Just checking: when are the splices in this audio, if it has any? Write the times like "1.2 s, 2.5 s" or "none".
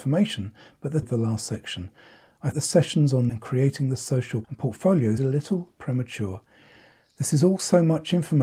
1.0 s, 2.5 s, 3.3 s, 4.4 s, 5.2 s